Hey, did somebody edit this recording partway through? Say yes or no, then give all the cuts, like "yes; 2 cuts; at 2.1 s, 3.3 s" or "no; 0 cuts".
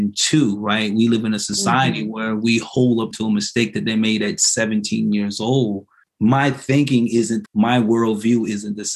yes; 3 cuts; at 3.1 s, 6.0 s, 7.5 s